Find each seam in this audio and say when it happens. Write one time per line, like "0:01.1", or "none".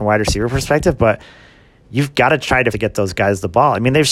0:02.7